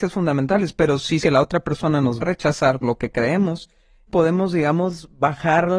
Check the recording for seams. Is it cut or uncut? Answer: cut